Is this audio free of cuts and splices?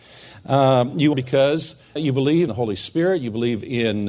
no; 3 cuts; at 1.1 s, 2.0 s, 2.5 s

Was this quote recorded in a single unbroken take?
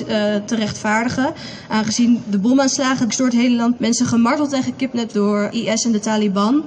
no; 4 cuts; at 3.1 s, 3.8 s, 5.1 s, 5.5 s

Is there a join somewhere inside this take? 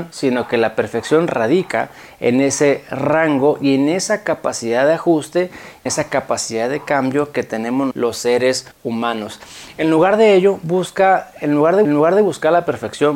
yes; 4 cuts; at 5.9 s, 7.9 s, 8.7 s, 11.8 s

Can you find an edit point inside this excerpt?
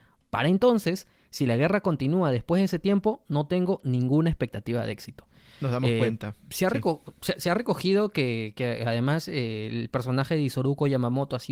no; 0 cuts

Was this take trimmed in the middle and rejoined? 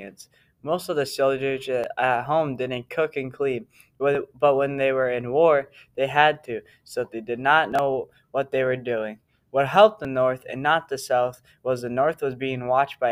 no; 0 cuts

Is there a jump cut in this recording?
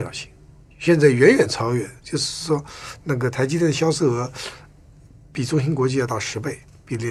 yes; 1 cut; at 2.0 s

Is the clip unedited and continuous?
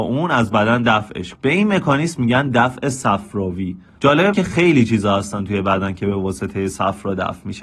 no; 2 cuts; at 1.3 s, 4.3 s

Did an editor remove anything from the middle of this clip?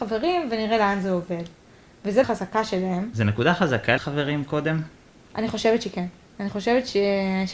yes; 2 cuts; at 2.2 s, 4.0 s

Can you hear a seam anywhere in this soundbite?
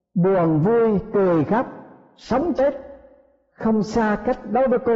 no; 0 cuts

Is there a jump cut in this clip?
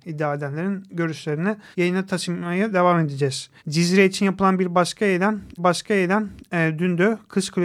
yes; 3 cuts; at 1.7 s, 3.6 s, 5.6 s

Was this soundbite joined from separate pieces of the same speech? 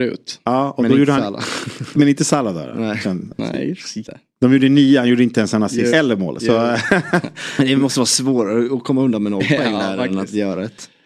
yes; 2 cuts; at 4.0 s, 5.9 s

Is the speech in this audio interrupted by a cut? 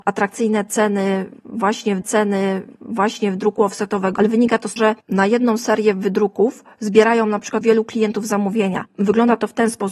yes; 3 cuts; at 2.0 s, 4.8 s, 7.6 s

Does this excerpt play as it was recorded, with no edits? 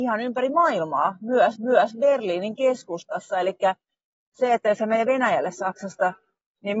no; 1 cut; at 1.6 s

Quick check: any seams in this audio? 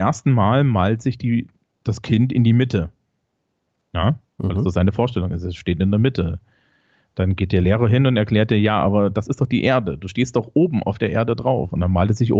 no; 0 cuts

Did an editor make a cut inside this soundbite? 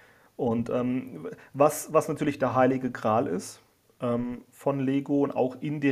no; 0 cuts

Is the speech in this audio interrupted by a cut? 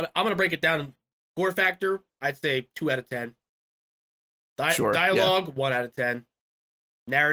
no; 0 cuts

